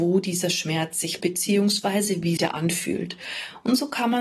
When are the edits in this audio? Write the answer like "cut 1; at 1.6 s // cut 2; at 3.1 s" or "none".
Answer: cut 1; at 1.2 s // cut 2; at 2.4 s